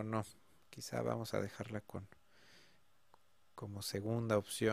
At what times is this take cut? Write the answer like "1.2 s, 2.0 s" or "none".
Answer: none